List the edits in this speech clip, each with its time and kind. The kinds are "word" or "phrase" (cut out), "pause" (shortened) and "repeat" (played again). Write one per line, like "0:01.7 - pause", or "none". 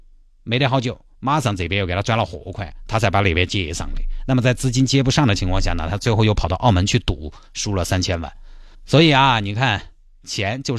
0:08.7 - pause

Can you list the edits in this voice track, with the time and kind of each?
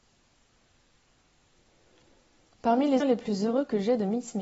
0:03.0 - word

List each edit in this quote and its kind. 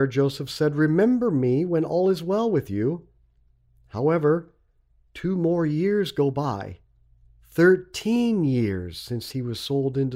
none

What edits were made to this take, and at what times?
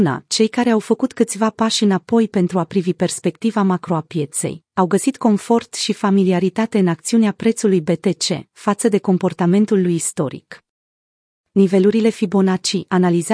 none

